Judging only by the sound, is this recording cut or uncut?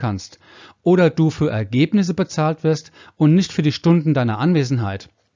uncut